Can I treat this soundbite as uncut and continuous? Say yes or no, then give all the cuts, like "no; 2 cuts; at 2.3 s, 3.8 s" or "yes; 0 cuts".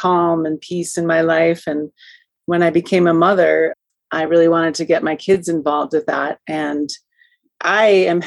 yes; 0 cuts